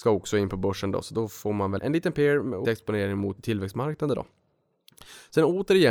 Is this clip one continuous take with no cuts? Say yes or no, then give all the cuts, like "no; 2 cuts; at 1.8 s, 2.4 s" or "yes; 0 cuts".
no; 3 cuts; at 1.8 s, 2.6 s, 3.4 s